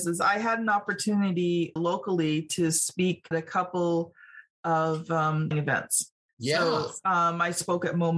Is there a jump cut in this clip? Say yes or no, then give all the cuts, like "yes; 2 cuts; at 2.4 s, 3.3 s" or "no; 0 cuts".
yes; 3 cuts; at 1.8 s, 3.3 s, 5.5 s